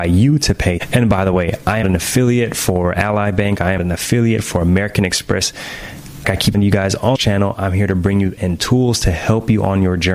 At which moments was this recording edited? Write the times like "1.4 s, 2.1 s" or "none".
1.8 s, 3.8 s, 6.2 s, 6.5 s, 7.2 s, 8.4 s